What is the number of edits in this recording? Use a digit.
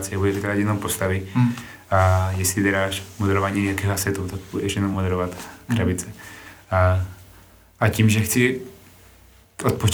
0